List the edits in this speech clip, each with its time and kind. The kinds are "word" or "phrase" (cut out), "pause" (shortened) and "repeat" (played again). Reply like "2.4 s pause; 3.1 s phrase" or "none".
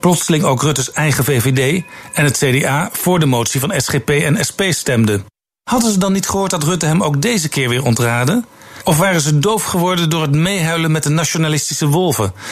none